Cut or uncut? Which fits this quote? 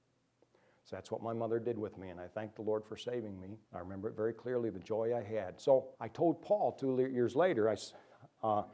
cut